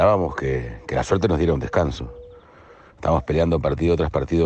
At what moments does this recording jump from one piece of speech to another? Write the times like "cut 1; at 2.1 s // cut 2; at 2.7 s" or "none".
none

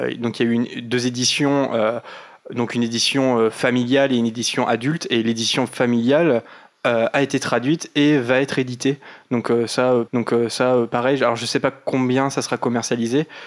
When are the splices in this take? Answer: cut 1; at 10.1 s

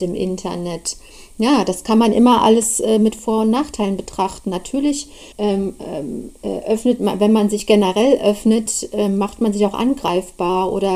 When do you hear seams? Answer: cut 1; at 5.3 s

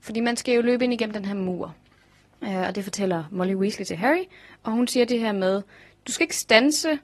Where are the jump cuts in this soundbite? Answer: none

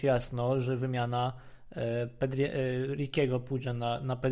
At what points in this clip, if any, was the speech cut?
none

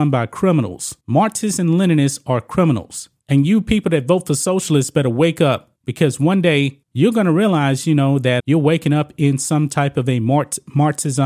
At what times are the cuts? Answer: cut 1; at 1.0 s // cut 2; at 3.2 s // cut 3; at 5.8 s // cut 4; at 6.8 s // cut 5; at 8.4 s

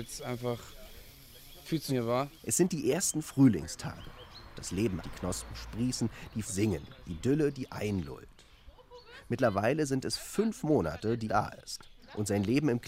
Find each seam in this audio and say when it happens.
cut 1; at 1.9 s // cut 2; at 5.0 s // cut 3; at 6.4 s // cut 4; at 11.3 s

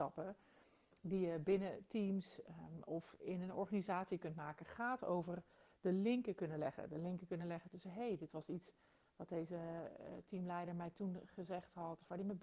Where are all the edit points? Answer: none

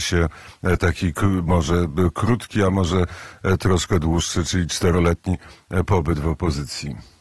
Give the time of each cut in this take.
none

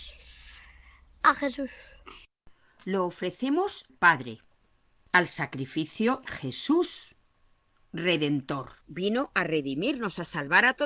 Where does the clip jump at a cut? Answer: cut 1; at 3.9 s // cut 2; at 5.1 s // cut 3; at 6.2 s // cut 4; at 8.8 s

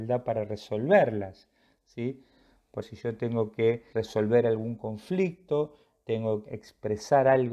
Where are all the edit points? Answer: cut 1; at 2.8 s // cut 2; at 3.9 s // cut 3; at 6.4 s

